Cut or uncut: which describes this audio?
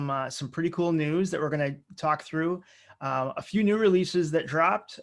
uncut